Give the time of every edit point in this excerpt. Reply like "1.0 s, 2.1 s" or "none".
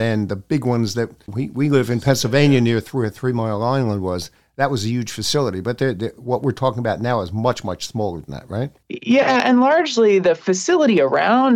1.3 s

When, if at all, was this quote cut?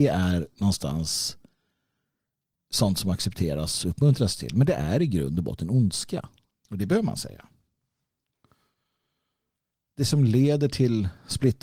6.5 s

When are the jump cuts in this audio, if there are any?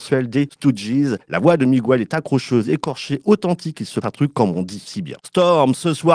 1.2 s, 4.0 s

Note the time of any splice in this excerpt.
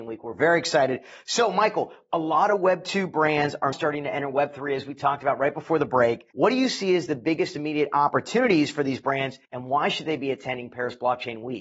3.7 s, 6.3 s, 9.4 s

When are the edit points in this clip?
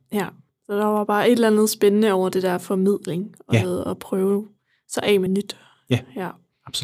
5.3 s

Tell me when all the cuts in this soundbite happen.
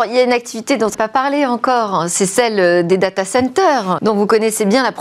0.9 s, 4.0 s

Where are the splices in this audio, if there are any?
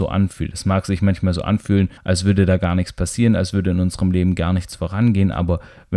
2.0 s

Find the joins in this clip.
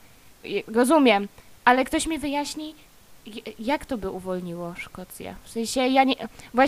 none

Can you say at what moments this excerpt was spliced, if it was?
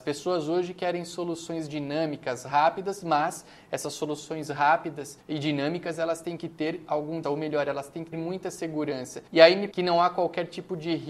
5.2 s, 7.2 s, 8.1 s, 9.3 s, 9.7 s

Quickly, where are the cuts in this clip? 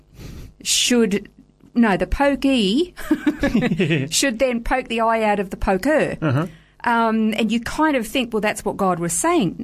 none

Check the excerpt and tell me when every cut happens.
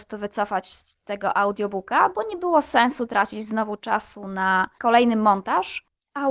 none

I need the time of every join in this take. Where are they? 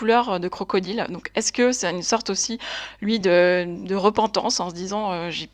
none

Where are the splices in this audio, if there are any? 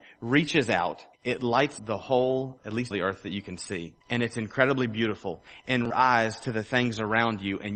1.1 s, 1.8 s, 2.6 s, 2.9 s, 4.0 s, 5.9 s

